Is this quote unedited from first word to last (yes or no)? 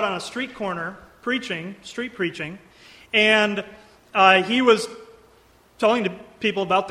yes